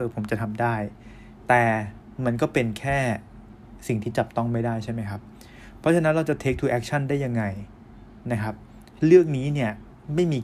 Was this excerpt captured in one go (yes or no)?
yes